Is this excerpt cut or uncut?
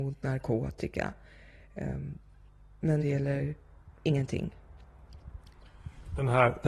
cut